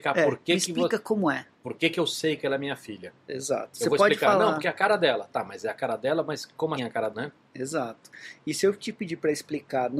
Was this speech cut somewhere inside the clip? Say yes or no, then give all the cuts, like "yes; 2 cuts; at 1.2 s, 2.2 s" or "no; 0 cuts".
yes; 3 cuts; at 1.5 s, 6.8 s, 7.1 s